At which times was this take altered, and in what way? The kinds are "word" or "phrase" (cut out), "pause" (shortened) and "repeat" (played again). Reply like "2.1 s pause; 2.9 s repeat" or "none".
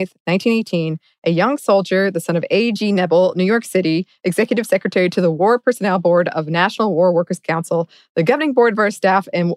none